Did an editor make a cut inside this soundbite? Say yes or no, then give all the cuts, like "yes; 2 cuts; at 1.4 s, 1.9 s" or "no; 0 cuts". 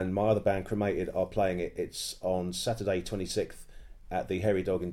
no; 0 cuts